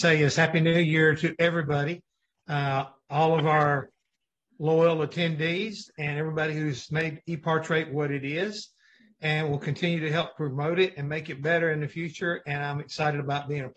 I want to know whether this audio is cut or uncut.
uncut